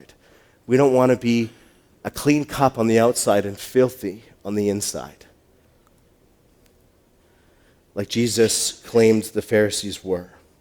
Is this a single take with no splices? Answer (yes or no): yes